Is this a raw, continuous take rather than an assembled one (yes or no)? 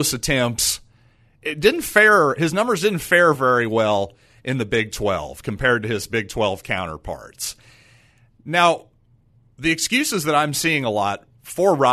yes